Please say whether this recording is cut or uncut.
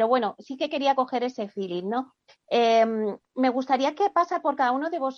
uncut